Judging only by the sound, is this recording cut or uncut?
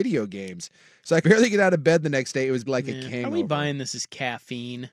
cut